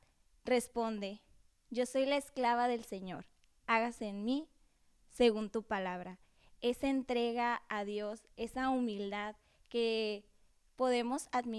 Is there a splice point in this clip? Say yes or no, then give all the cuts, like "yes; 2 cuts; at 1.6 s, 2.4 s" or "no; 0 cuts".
yes; 1 cut; at 8.3 s